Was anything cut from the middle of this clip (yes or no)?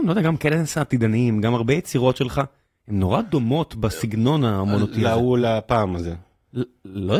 no